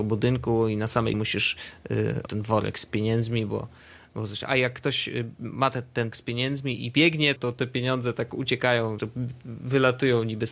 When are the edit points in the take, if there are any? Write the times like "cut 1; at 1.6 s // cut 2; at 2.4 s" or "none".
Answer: cut 1; at 1.1 s // cut 2; at 2.3 s // cut 3; at 4.5 s // cut 4; at 6.1 s // cut 5; at 7.4 s // cut 6; at 9.0 s